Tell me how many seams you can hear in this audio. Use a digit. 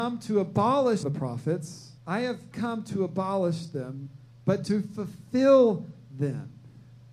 4